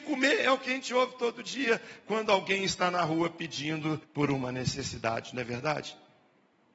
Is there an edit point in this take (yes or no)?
yes